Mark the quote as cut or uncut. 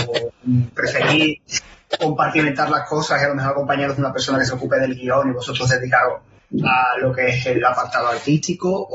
uncut